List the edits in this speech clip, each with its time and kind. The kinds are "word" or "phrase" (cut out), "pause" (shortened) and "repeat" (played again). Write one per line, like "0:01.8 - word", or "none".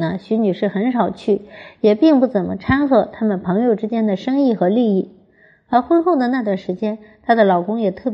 none